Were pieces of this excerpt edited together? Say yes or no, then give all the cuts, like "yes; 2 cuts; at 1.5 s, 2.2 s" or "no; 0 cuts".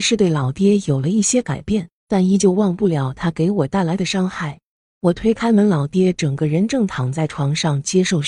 no; 0 cuts